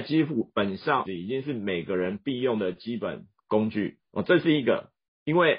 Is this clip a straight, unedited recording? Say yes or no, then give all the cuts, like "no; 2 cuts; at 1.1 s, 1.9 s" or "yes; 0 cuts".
no; 1 cut; at 1.0 s